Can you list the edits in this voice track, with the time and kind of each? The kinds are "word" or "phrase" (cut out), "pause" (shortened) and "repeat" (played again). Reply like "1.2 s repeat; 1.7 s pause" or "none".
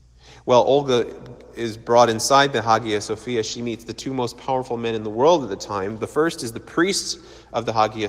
none